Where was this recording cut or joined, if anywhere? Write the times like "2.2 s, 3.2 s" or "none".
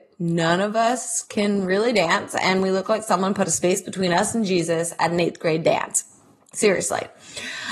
none